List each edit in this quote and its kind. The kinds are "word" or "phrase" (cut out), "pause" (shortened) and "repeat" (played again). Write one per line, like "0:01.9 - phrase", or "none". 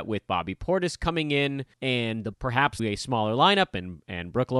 0:01.7 - pause
0:02.3 - word
0:02.8 - phrase